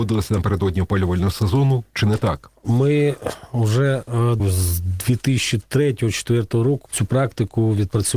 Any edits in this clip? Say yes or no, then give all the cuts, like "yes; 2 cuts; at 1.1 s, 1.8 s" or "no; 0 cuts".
yes; 3 cuts; at 1.9 s, 4.4 s, 6.9 s